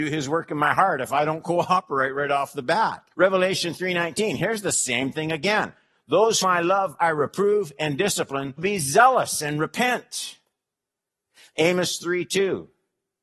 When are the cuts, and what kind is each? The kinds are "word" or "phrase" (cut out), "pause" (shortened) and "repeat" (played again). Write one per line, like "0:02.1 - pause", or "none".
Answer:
0:03.1 - pause
0:06.4 - word
0:08.6 - word